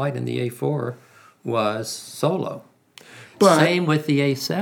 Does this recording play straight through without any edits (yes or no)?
yes